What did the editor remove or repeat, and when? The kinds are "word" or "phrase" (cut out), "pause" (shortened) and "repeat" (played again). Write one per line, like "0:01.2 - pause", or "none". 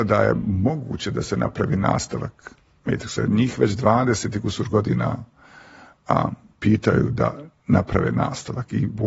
none